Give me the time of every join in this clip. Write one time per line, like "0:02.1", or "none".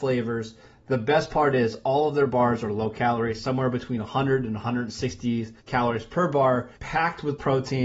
0:05.6
0:06.8